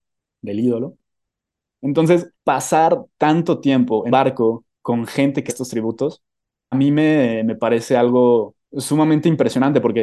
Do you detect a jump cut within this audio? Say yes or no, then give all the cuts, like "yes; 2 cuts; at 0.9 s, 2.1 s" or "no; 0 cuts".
yes; 6 cuts; at 2.3 s, 4.1 s, 4.7 s, 5.5 s, 6.7 s, 8.6 s